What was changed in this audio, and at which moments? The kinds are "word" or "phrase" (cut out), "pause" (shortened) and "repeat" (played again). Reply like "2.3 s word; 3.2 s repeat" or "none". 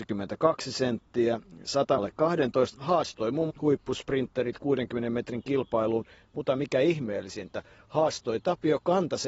2.0 s word; 2.7 s phrase; 3.5 s phrase